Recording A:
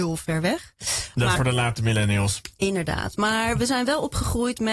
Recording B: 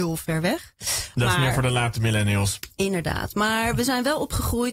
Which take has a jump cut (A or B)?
A